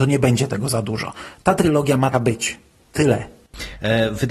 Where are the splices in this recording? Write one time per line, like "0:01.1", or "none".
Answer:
0:02.1